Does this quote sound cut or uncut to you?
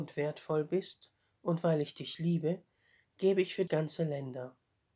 cut